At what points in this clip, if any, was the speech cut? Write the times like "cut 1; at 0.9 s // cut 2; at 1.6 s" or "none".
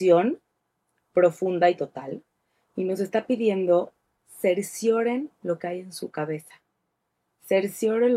none